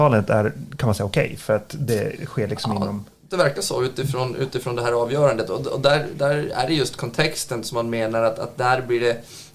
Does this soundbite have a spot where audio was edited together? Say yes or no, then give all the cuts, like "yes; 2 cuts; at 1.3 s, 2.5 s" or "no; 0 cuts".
no; 0 cuts